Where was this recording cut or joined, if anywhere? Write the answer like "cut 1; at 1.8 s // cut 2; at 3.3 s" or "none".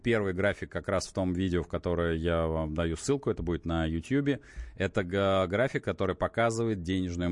none